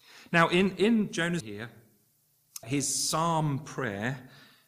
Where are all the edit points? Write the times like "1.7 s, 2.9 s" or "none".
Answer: 1.4 s, 2.6 s